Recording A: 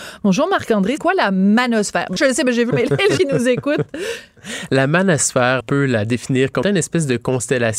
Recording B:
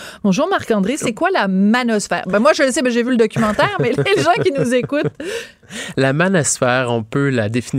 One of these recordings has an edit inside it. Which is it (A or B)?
A